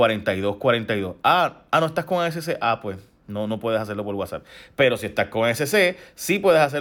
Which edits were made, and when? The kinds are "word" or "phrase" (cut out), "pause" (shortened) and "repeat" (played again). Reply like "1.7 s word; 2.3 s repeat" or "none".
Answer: none